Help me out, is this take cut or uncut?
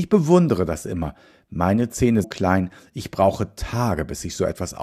cut